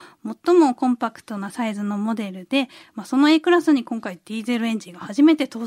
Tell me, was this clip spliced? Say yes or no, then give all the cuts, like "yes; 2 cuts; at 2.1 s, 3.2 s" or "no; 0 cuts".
no; 0 cuts